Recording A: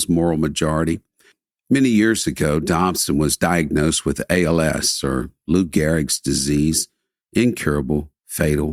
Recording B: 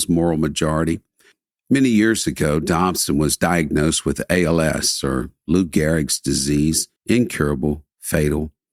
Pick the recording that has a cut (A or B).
B